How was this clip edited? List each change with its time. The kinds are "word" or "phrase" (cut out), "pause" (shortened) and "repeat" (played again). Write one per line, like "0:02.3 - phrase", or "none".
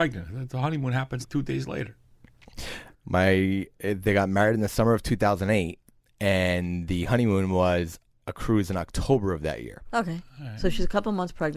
0:01.2 - word